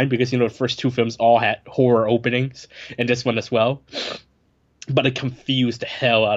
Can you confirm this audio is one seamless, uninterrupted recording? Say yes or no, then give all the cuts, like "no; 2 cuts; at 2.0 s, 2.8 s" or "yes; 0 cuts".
yes; 0 cuts